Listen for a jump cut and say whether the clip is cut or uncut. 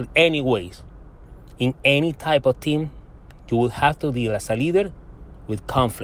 uncut